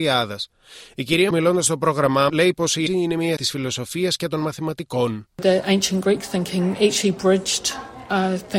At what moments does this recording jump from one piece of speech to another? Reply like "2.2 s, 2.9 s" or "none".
1.3 s, 2.3 s, 2.9 s, 3.4 s, 5.3 s